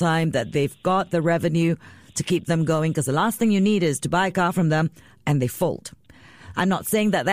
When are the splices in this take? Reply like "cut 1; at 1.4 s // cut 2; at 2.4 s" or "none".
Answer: none